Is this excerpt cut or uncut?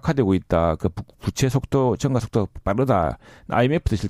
uncut